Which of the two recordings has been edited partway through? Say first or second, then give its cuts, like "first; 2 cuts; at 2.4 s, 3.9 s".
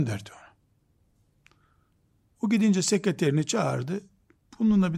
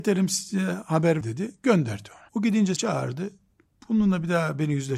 second; 3 cuts; at 1.2 s, 2.3 s, 2.8 s